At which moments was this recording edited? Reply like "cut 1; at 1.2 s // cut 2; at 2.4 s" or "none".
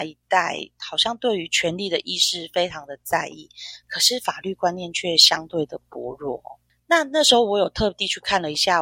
none